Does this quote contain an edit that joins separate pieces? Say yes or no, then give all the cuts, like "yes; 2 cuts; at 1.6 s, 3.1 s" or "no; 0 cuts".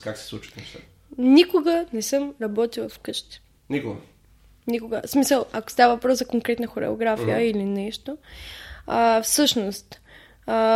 no; 0 cuts